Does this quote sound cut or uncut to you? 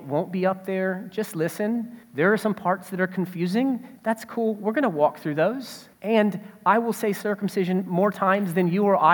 cut